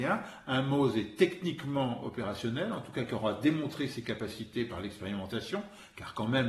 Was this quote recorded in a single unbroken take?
yes; 0 cuts

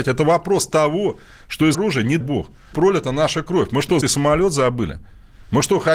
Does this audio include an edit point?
yes; 4 cuts; at 1.7 s, 2.2 s, 2.7 s, 4.0 s

